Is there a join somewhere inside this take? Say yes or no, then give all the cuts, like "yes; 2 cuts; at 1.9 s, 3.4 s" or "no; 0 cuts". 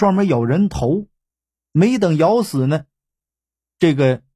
no; 0 cuts